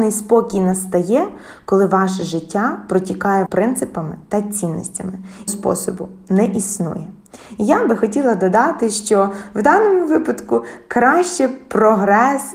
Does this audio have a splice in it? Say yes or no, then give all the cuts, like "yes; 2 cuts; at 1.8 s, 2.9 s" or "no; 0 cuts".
yes; 2 cuts; at 3.5 s, 5.5 s